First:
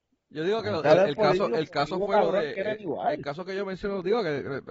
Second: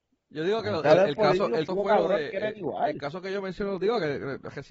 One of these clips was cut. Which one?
second; 1 cut; at 1.7 s

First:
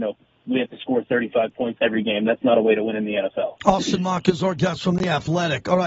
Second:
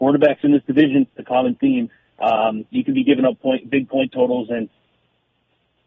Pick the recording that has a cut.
first; 1 cut; at 1.8 s

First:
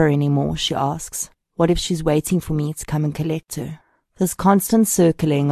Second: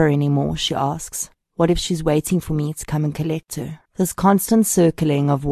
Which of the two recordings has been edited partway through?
second; 1 cut; at 3.9 s

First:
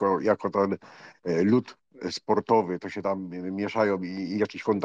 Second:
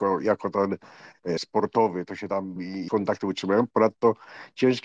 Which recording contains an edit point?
second; 3 cuts; at 1.4 s, 2.6 s, 2.9 s

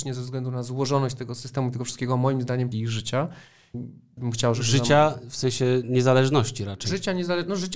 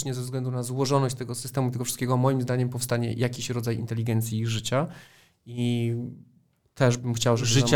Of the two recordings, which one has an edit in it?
first; 3 cuts; at 2.7 s, 3.7 s, 4.2 s

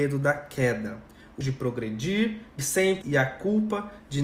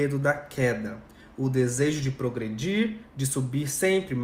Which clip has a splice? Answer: first; 3 cuts; at 1.4 s, 2.6 s, 3.0 s

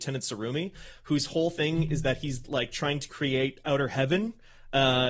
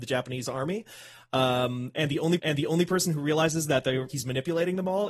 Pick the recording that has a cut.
second; 2 cuts; at 2.4 s, 4.1 s

